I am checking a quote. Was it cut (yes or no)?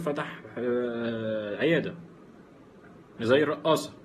no